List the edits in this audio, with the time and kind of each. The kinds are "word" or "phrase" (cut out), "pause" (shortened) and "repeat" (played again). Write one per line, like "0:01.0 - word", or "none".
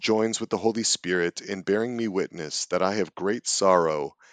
none